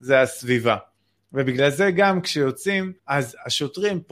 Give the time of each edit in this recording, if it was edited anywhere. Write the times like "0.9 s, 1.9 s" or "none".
3.0 s